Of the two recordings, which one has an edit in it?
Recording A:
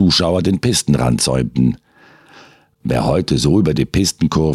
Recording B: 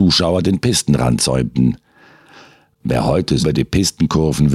B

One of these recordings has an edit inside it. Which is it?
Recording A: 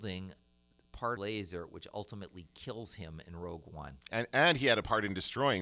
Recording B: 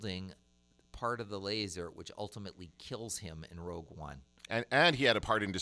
A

